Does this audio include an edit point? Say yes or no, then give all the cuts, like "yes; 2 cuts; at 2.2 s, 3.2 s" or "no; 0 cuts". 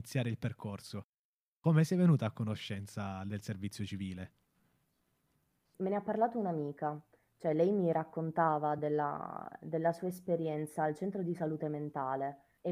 no; 0 cuts